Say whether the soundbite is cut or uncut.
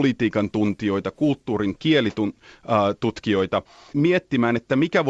cut